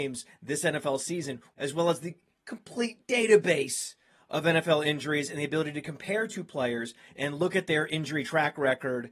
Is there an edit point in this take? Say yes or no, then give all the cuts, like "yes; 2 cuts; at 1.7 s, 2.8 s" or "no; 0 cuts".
no; 0 cuts